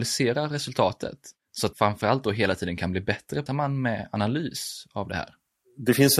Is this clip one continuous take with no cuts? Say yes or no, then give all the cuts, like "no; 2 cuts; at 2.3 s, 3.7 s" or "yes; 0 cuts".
no; 3 cuts; at 1.4 s, 1.7 s, 3.5 s